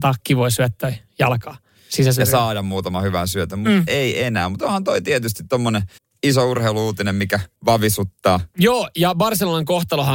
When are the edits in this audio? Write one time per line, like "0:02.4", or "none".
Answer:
0:01.7
0:06.0
0:07.5